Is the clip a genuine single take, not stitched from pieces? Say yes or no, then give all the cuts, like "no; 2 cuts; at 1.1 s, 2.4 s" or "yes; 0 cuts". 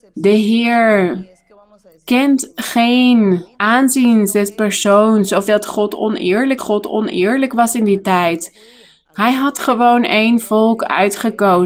no; 3 cuts; at 3.5 s, 5.5 s, 6.6 s